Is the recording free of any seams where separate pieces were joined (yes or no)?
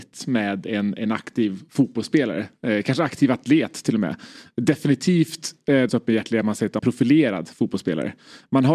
no